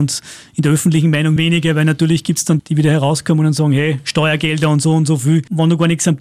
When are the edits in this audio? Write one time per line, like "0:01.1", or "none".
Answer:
0:01.4
0:02.6